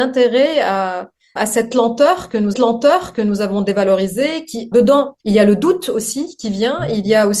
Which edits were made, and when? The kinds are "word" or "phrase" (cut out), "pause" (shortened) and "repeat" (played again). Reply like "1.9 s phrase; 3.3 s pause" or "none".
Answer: 1.4 s word; 2.5 s repeat; 4.7 s word; 5.2 s pause